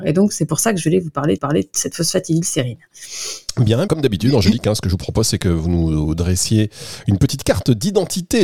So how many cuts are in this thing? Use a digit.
2